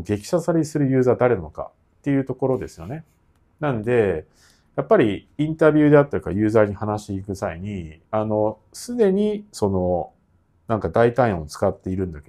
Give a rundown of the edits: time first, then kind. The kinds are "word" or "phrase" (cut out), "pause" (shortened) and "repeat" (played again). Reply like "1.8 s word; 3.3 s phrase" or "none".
8.1 s pause